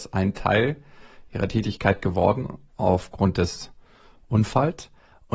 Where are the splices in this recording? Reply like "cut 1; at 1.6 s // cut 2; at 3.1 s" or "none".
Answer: cut 1; at 2.7 s